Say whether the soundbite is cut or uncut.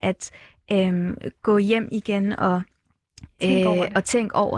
uncut